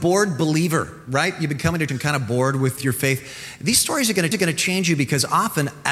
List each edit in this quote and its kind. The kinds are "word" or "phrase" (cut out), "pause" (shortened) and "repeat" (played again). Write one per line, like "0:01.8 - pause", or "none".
0:01.9 - word
0:02.8 - word
0:04.3 - repeat